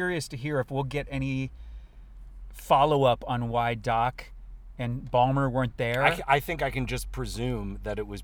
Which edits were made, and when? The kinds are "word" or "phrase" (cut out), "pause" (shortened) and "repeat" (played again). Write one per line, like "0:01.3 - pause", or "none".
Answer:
none